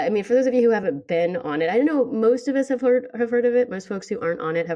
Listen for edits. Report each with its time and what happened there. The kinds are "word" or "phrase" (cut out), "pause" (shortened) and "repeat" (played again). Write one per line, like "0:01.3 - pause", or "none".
none